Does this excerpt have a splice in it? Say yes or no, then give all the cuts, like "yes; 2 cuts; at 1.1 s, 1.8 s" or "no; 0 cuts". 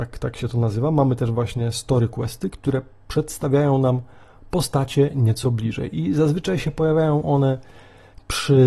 no; 0 cuts